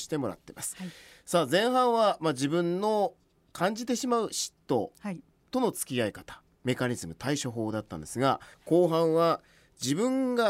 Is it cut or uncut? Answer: cut